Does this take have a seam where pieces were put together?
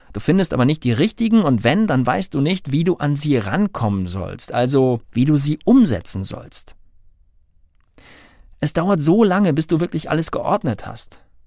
yes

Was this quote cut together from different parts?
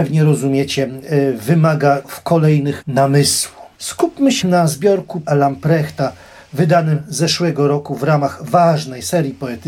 yes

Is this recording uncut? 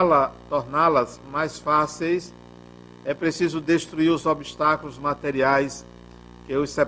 yes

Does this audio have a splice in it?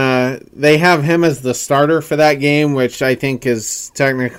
no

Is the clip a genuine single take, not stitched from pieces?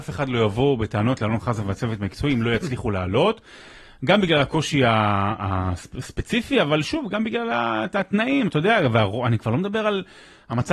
yes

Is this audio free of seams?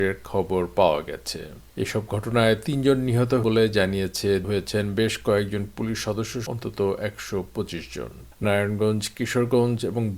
no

